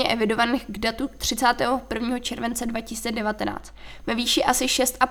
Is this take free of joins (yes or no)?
yes